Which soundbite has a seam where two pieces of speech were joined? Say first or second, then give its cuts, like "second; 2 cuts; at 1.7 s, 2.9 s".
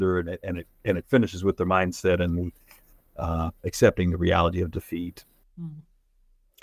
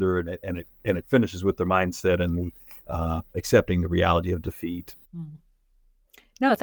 second; 2 cuts; at 2.8 s, 5.0 s